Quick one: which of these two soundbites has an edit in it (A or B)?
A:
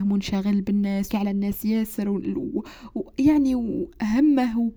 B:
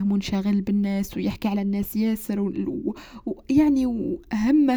A